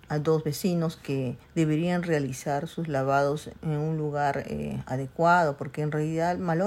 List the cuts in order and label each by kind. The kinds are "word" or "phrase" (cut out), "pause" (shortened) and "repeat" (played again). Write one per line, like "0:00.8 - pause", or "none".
0:01.4 - pause
0:03.5 - word